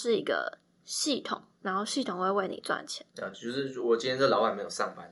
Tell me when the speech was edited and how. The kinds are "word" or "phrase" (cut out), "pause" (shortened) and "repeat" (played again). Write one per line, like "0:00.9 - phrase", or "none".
0:03.1 - pause